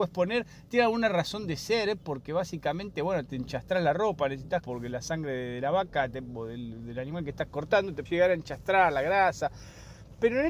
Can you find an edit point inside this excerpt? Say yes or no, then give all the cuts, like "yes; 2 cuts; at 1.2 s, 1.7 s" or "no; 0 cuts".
yes; 2 cuts; at 4.6 s, 8.1 s